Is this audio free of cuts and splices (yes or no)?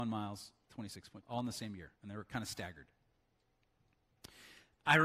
no